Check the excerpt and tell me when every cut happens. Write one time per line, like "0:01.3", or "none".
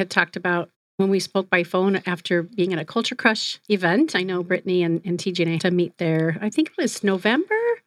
0:05.6

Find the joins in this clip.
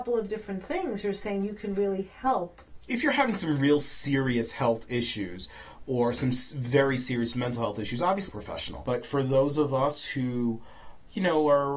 0:08.3

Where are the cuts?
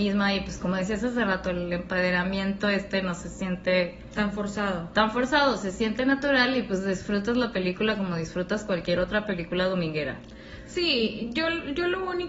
none

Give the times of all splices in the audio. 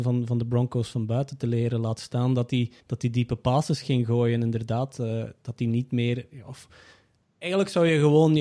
0:02.8

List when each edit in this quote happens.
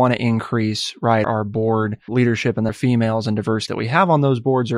0:01.2
0:02.1
0:02.7
0:03.7

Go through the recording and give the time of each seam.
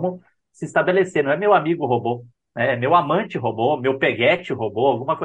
none

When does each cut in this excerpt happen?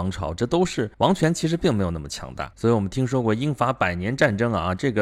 0:00.9
0:02.5

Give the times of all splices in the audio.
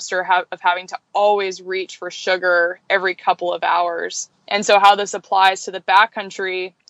none

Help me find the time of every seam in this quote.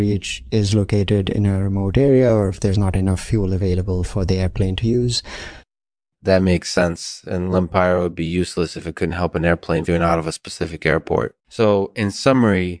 0:09.9
0:11.4

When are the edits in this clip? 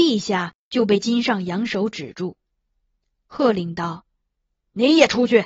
none

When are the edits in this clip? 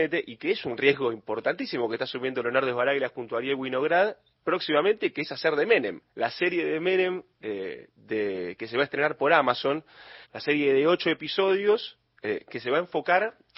0:04.3
0:06.1
0:10.2

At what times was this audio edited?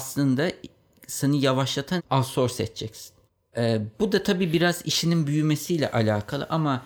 0:02.0
0:03.3

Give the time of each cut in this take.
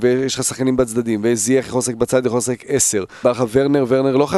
0:03.2

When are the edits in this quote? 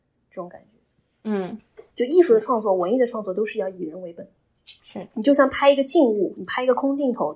0:01.9
0:04.8

